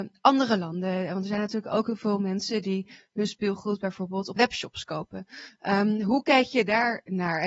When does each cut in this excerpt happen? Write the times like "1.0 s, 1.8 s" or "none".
4.4 s